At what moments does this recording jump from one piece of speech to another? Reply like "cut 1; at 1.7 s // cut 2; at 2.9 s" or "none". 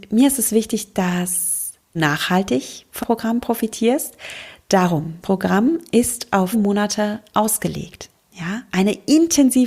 cut 1; at 2.0 s // cut 2; at 3.0 s // cut 3; at 5.2 s // cut 4; at 6.5 s